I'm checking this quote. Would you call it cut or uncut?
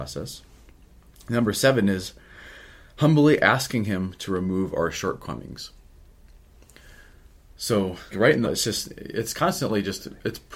cut